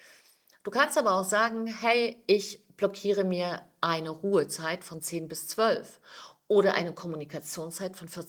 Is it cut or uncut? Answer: uncut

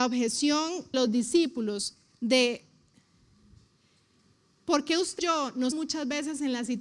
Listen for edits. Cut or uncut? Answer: cut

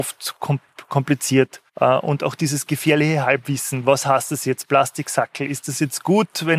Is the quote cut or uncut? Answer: cut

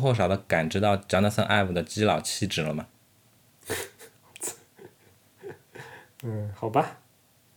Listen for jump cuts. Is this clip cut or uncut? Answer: uncut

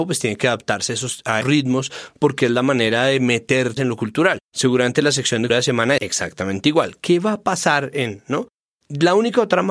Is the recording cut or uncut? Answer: cut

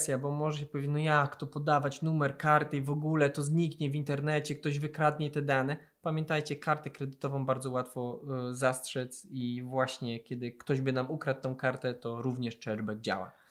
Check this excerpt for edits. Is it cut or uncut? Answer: uncut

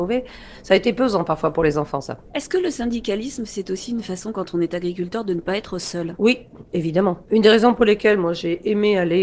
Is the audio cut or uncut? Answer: cut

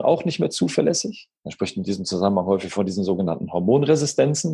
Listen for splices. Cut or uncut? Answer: cut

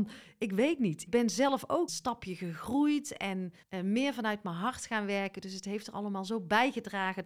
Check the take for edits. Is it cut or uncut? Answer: cut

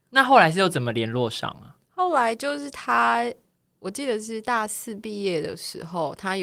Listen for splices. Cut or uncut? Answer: uncut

